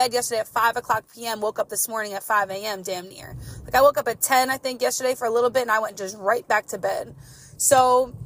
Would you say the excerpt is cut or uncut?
uncut